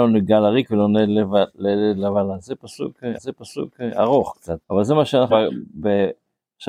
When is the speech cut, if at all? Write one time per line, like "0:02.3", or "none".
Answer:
0:03.2
0:04.6
0:05.3